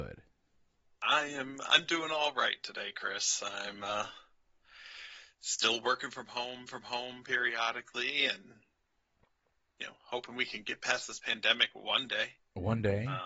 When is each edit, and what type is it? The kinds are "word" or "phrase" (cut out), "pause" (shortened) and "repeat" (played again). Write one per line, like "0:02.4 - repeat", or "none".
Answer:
0:06.7 - repeat